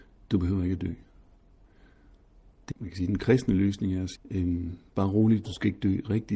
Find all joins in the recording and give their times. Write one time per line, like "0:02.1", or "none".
0:02.7
0:04.2